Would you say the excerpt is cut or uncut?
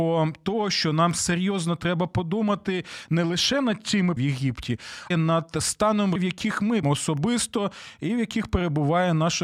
cut